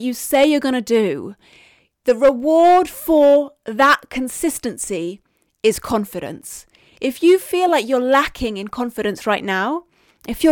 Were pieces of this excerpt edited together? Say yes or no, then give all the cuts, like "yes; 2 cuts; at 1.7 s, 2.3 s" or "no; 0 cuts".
no; 0 cuts